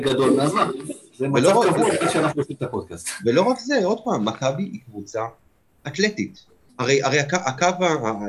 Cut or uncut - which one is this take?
cut